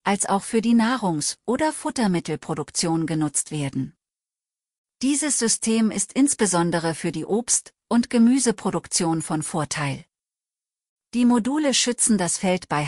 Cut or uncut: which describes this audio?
uncut